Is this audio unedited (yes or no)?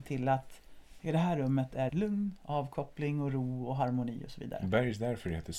no